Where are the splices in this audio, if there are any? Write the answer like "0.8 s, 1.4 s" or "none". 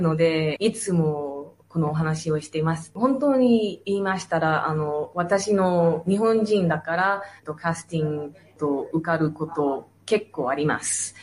7.4 s